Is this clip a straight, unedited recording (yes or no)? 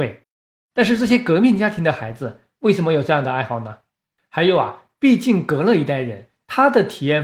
yes